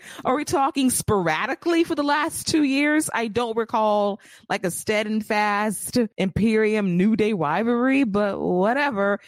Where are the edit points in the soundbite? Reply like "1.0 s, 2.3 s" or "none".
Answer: 6.1 s